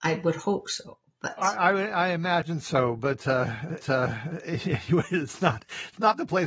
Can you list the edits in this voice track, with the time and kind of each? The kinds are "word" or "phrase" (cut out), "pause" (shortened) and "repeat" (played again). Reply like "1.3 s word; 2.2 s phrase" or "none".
3.8 s repeat